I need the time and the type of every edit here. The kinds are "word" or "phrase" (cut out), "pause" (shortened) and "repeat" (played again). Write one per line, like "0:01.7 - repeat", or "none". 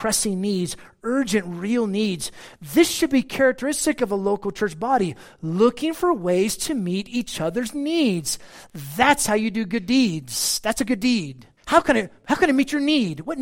0:11.6 - pause